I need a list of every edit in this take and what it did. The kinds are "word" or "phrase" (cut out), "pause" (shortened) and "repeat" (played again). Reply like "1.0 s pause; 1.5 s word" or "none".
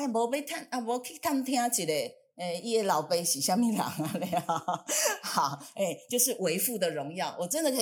none